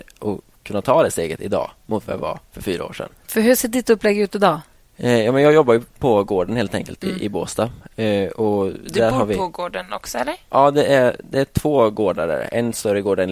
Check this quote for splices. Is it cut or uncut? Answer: cut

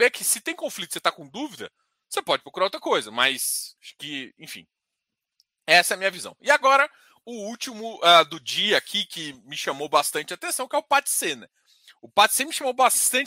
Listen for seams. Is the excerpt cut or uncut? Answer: cut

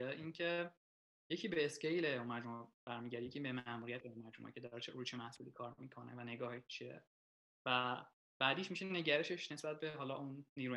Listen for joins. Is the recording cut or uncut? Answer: uncut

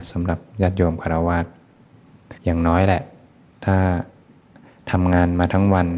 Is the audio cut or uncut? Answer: cut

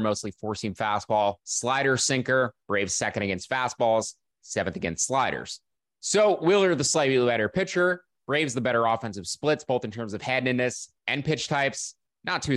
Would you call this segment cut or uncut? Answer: cut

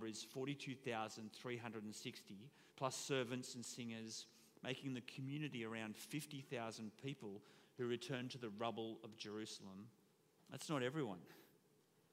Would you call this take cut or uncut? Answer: cut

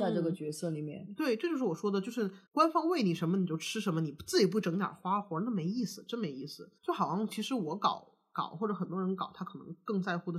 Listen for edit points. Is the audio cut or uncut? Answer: cut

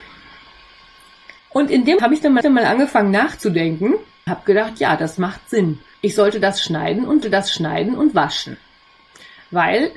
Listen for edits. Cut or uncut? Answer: cut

